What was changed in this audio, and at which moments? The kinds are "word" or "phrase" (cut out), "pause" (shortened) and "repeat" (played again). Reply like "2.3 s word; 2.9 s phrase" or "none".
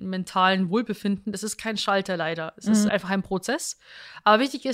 2.9 s word